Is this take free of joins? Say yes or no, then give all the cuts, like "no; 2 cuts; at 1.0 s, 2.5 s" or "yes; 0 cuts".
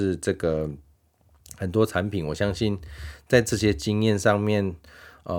yes; 0 cuts